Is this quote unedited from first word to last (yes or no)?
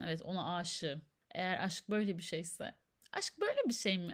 yes